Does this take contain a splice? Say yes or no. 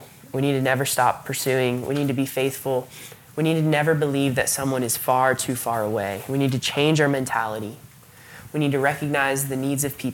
no